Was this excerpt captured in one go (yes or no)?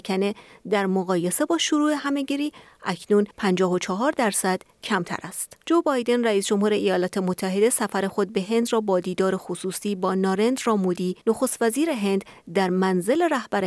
no